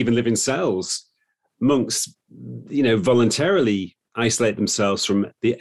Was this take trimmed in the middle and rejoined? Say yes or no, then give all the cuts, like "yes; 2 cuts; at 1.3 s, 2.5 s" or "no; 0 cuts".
no; 0 cuts